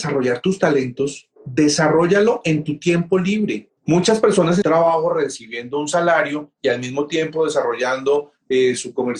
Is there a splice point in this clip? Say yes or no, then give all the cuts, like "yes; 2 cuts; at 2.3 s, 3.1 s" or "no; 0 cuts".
yes; 3 cuts; at 1.4 s, 3.8 s, 4.6 s